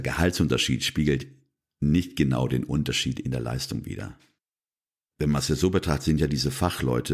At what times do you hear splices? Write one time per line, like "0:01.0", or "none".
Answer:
none